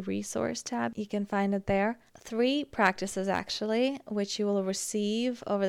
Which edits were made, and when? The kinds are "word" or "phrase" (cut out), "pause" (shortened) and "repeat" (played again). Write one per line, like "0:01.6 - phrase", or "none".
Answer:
0:02.1 - pause